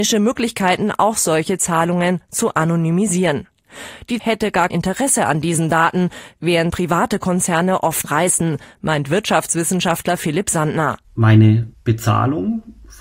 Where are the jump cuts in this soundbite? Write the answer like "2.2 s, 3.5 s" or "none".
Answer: 4.2 s, 4.7 s, 6.7 s, 8.0 s